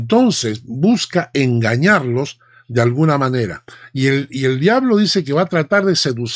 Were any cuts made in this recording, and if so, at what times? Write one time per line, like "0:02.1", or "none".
none